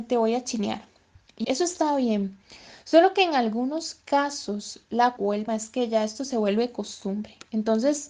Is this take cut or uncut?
cut